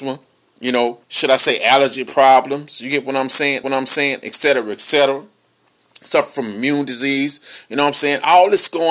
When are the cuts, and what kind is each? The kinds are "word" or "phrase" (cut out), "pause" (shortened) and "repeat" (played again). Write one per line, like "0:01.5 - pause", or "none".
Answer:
0:01.0 - pause
0:03.6 - repeat